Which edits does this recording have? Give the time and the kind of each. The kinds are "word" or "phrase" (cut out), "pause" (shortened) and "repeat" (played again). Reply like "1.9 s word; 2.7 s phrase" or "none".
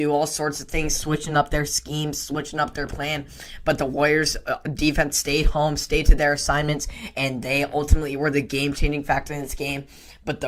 none